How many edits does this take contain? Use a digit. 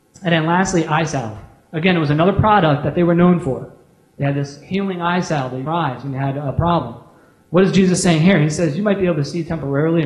1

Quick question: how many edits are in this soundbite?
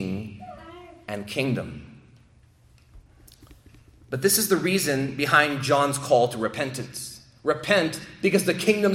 0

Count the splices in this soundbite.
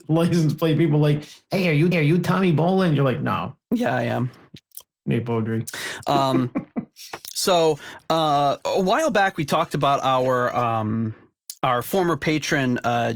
2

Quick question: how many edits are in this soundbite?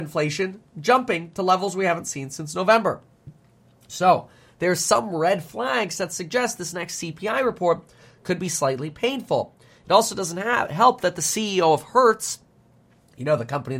0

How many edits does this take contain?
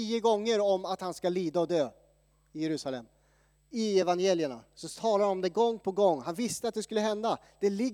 0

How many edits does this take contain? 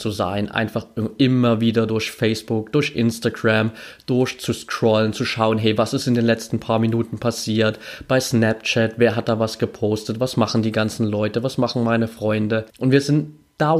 1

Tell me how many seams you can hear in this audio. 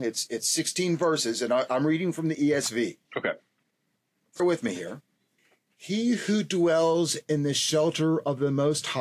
3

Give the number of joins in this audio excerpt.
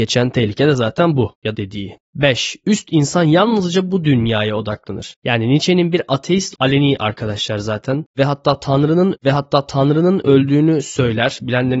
3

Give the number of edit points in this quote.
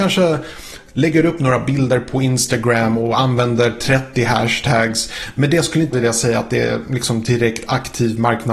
1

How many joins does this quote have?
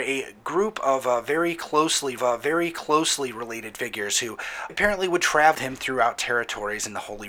3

